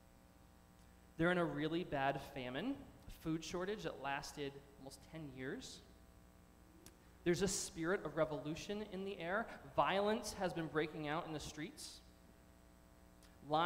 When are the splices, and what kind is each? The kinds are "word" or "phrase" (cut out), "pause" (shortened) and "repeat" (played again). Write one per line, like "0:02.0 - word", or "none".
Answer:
none